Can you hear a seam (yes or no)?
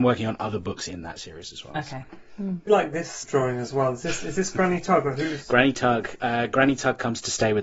yes